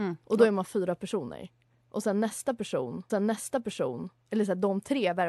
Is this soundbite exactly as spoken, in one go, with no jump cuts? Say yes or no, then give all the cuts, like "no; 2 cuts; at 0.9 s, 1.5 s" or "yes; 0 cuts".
no; 1 cut; at 3.1 s